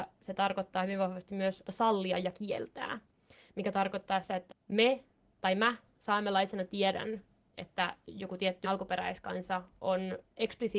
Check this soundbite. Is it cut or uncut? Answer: cut